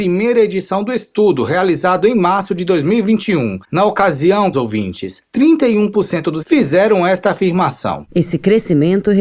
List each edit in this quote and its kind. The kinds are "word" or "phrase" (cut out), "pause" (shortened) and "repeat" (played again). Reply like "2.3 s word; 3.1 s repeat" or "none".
4.5 s word; 6.4 s word